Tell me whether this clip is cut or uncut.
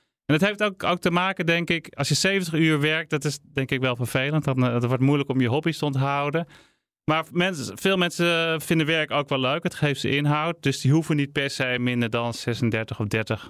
uncut